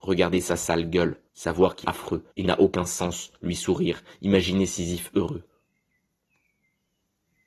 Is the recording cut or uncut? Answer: cut